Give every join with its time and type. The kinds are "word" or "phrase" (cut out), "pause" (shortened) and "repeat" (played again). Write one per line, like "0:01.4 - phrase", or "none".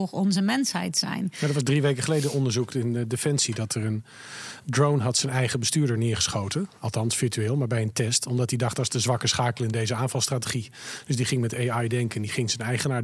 none